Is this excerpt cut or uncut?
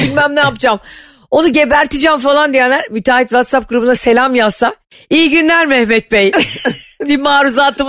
uncut